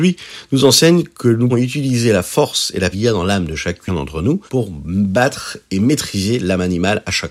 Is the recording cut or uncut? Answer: cut